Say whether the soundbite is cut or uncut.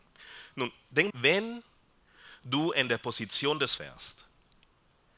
cut